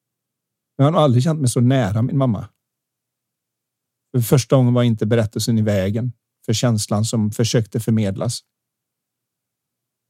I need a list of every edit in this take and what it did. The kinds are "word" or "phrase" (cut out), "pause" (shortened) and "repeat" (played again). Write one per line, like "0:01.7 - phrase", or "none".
none